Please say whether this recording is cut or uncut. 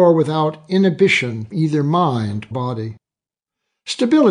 cut